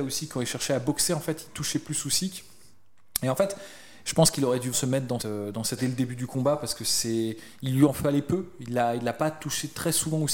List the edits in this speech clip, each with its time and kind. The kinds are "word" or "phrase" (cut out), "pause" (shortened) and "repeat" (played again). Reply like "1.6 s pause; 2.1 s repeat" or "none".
4.7 s word; 5.2 s word; 5.8 s word